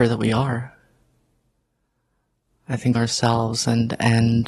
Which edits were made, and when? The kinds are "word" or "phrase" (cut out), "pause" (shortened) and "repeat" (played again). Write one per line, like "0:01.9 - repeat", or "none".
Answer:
0:02.9 - phrase

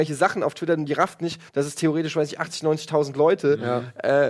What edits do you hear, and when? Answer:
0:01.5 - pause

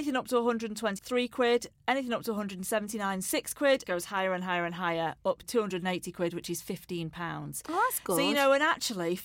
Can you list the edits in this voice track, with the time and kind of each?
0:01.0 - word
0:03.8 - phrase
0:05.4 - word

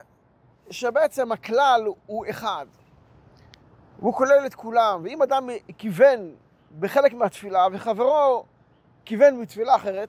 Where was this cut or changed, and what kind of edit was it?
none

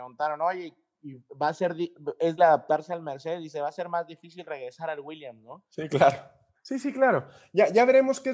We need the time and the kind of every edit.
0:02.4 - word
0:06.6 - pause

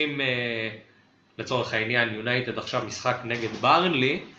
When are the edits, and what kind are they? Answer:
0:02.8 - word

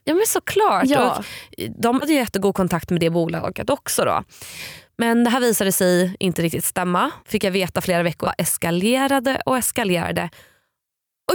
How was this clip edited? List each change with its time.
0:02.0 - word
0:07.2 - pause
0:08.2 - phrase

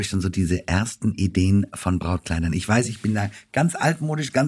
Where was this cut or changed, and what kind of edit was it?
none

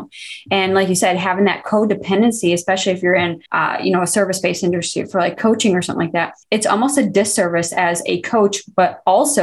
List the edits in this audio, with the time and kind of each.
0:03.5 - pause
0:06.4 - pause

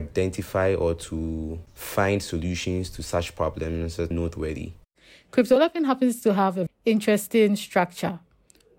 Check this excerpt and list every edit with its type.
0:04.1 - word
0:06.7 - word

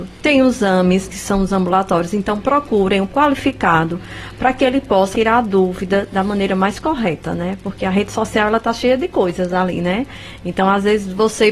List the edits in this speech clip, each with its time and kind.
0:01.1 - word
0:03.1 - word
0:05.1 - word

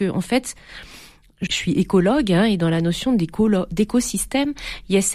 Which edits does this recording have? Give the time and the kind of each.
0:01.5 - word

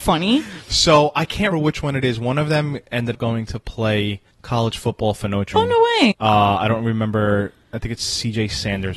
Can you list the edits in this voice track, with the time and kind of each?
0:01.5 - word
0:03.1 - word
0:04.3 - pause
0:05.5 - word
0:06.1 - word

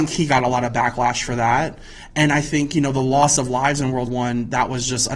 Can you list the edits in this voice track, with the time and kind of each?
0:04.1 - word

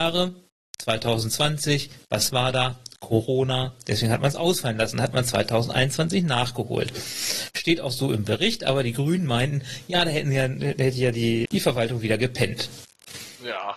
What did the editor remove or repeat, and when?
0:11.5 - word

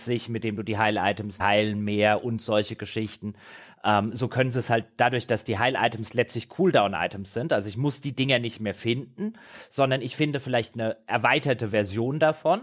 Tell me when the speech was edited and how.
0:01.4 - phrase

